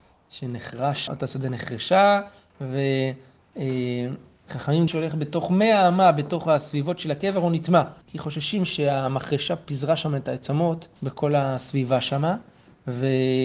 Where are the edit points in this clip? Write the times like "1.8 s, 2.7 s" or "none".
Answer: 1.1 s, 4.9 s, 8.0 s, 11.0 s